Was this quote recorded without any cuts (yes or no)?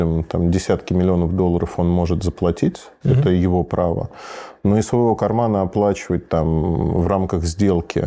yes